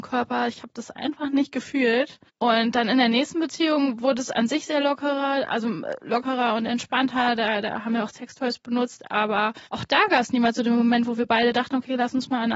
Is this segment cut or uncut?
cut